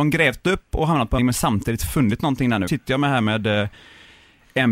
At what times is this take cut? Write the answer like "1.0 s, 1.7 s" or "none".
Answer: 1.2 s, 2.7 s